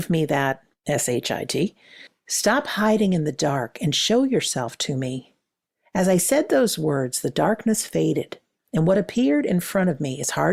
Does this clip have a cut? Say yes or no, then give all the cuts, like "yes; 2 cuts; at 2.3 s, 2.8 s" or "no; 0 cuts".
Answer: no; 0 cuts